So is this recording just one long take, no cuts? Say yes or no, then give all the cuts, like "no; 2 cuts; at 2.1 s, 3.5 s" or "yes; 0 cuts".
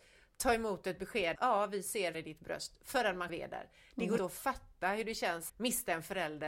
no; 5 cuts; at 1.4 s, 2.1 s, 3.3 s, 4.2 s, 5.5 s